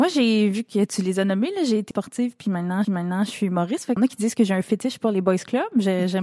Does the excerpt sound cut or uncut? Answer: cut